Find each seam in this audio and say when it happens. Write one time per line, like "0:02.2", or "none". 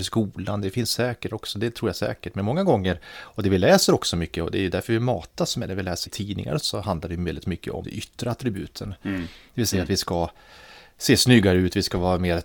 0:01.3
0:06.1
0:06.6
0:07.8